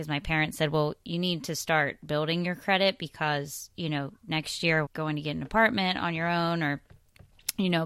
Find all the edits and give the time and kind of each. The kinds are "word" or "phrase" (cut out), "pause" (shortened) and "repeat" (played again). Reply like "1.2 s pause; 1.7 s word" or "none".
4.9 s phrase